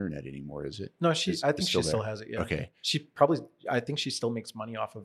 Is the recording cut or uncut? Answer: uncut